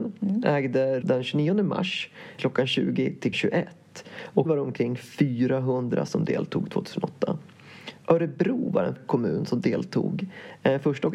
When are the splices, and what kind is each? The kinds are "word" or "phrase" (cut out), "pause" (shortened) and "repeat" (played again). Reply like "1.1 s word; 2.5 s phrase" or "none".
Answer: 1.0 s word; 2.4 s word; 3.3 s word; 4.5 s word; 6.1 s word; 9.0 s word